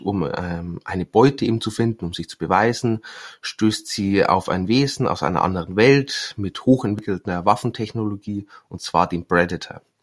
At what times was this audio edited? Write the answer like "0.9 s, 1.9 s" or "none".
none